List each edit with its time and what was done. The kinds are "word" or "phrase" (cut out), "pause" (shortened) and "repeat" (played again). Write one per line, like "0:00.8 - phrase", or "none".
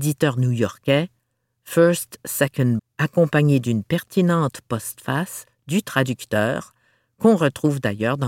0:02.8 - word